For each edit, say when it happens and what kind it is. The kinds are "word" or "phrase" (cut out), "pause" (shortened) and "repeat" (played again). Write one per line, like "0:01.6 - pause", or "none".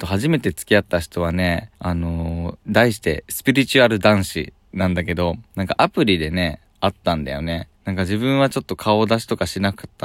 0:01.7 - pause
0:02.6 - pause
0:05.5 - pause
0:07.7 - pause

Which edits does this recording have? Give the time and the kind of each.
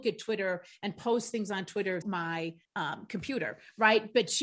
0:02.0 - word
0:02.6 - pause

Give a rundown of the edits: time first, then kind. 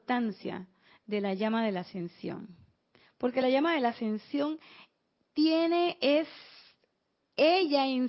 none

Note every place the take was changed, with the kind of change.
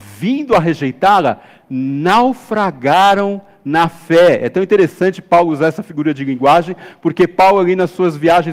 none

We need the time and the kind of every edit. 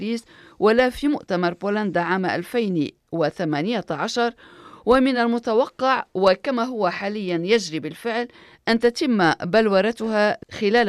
none

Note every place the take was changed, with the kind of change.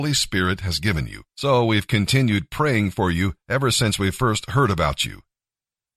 0:01.3 - pause
0:03.4 - pause

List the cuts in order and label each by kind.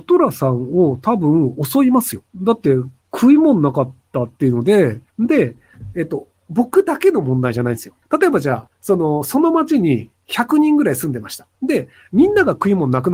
0:02.3 - pause
0:03.0 - pause
0:05.1 - pause
0:08.0 - pause
0:11.5 - pause

